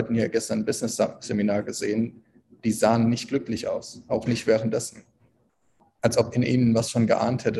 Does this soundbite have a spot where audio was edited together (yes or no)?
no